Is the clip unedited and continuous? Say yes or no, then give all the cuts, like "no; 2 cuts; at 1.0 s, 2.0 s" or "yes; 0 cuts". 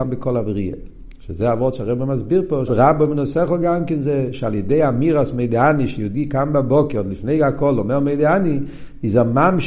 no; 1 cut; at 2.7 s